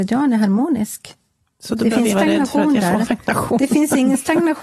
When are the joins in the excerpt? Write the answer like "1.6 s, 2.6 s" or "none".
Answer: 2.1 s, 3.1 s